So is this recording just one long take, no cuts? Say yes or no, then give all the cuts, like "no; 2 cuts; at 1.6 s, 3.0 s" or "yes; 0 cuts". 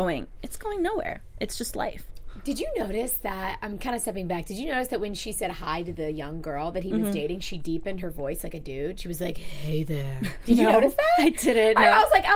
yes; 0 cuts